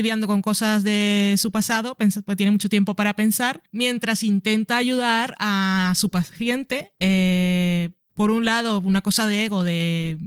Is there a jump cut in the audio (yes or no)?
no